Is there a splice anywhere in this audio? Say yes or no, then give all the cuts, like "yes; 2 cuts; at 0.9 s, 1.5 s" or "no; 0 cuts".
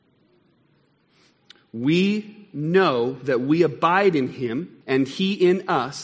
yes; 1 cut; at 4.8 s